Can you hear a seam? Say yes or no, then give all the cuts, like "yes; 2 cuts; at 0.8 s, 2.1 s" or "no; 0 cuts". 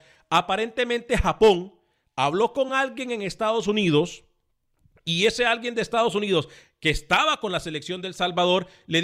no; 0 cuts